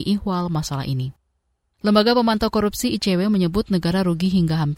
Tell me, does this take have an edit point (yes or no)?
no